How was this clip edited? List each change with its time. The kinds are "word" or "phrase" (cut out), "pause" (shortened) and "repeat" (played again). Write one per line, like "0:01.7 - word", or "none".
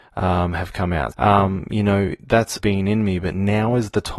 0:01.1 - word
0:02.6 - word